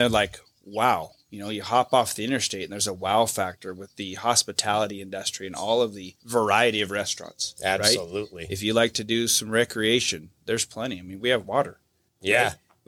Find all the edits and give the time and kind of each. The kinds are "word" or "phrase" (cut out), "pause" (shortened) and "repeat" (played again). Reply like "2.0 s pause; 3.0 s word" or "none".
6.2 s pause; 11.4 s word